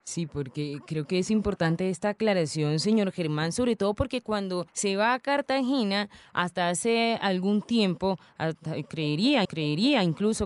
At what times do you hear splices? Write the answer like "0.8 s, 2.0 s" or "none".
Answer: 4.7 s, 9.4 s